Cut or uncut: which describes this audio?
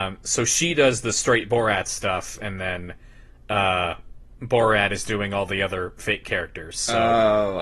uncut